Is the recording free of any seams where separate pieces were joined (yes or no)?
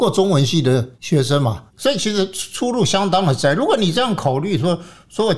no